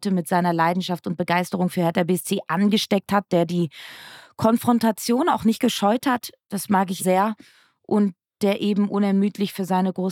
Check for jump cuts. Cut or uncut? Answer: cut